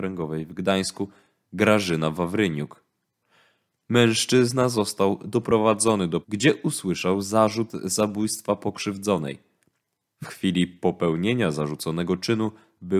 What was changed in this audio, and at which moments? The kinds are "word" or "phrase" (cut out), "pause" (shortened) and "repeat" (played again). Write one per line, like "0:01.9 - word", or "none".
0:06.2 - phrase